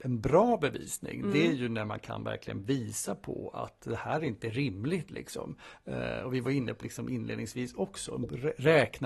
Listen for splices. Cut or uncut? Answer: cut